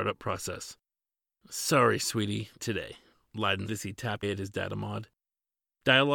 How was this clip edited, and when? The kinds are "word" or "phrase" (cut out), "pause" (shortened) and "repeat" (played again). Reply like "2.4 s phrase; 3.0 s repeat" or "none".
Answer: 2.6 s word; 3.7 s word; 4.2 s word